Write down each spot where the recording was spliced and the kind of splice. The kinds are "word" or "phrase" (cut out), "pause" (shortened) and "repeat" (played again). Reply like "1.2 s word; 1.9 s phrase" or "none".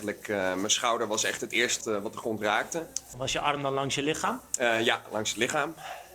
1.8 s word